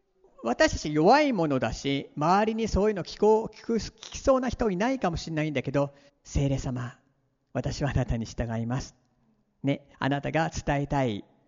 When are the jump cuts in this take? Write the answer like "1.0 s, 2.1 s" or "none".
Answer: 6.1 s, 9.9 s